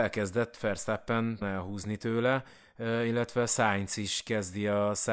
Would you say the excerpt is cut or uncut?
cut